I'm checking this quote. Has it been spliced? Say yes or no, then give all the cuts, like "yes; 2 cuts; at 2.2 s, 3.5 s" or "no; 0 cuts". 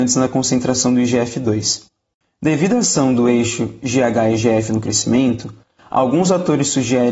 no; 0 cuts